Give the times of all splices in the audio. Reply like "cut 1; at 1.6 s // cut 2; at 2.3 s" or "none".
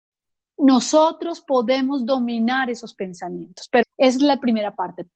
cut 1; at 3.8 s